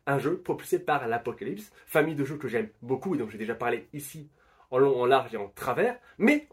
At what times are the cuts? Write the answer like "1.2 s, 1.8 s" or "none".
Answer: 1.8 s